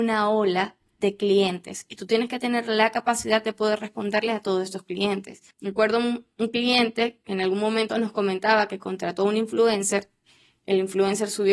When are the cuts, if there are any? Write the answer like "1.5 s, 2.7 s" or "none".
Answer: 5.5 s